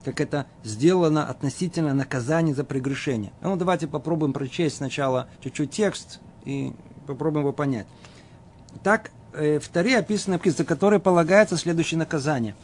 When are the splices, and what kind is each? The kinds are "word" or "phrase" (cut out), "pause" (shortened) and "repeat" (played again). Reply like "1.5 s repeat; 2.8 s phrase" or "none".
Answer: 3.4 s pause; 5.3 s pause; 10.4 s word